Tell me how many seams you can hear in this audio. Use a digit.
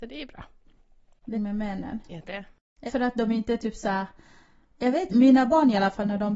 4